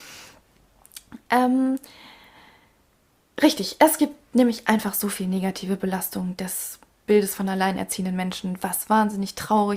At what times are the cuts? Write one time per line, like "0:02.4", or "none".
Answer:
none